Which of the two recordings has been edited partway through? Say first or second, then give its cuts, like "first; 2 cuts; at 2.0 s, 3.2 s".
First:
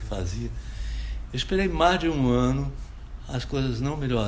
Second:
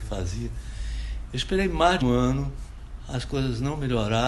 second; 1 cut; at 2.0 s